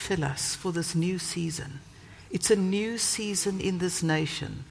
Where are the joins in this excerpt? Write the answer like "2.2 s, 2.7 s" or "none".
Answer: none